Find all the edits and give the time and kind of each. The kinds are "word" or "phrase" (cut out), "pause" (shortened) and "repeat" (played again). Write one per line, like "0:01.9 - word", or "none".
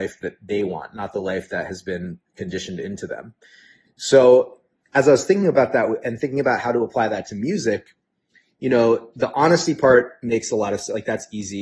none